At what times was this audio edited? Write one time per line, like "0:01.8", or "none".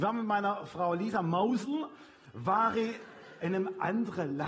none